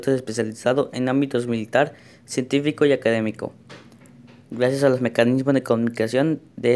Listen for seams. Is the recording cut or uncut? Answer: uncut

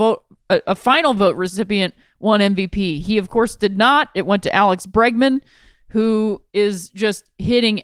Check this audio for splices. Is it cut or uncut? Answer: uncut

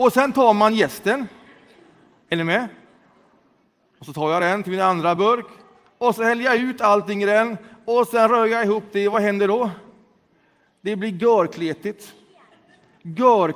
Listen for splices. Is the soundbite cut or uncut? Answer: uncut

